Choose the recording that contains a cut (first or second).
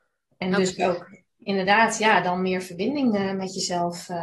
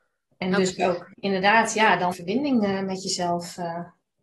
second